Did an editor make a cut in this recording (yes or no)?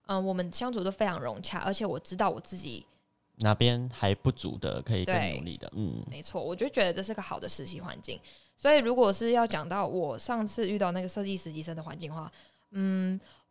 no